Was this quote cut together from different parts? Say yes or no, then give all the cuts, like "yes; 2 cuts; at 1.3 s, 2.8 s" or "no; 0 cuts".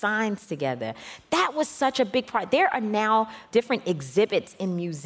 yes; 1 cut; at 3.5 s